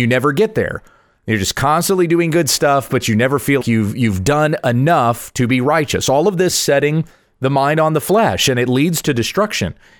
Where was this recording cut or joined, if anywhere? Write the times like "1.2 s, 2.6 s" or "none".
3.6 s, 6.5 s